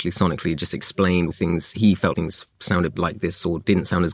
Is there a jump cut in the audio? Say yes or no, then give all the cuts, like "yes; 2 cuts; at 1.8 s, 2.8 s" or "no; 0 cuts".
yes; 3 cuts; at 1.3 s, 2.1 s, 2.9 s